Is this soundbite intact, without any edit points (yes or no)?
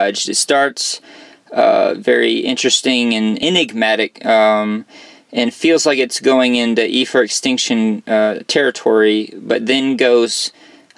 no